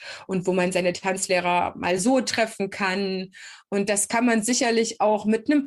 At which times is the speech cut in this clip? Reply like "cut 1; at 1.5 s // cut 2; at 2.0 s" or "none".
none